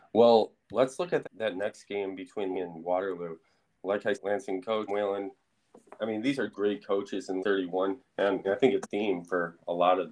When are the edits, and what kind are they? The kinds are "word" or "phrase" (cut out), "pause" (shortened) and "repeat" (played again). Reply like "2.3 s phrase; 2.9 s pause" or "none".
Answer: 1.2 s word; 2.5 s word; 4.1 s word; 4.9 s word; 6.5 s word; 7.4 s word; 8.0 s word; 8.4 s word; 8.8 s word